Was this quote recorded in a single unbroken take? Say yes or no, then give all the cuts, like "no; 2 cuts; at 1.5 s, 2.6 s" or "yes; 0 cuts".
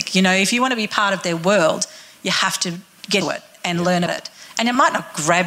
no; 2 cuts; at 3.2 s, 4.1 s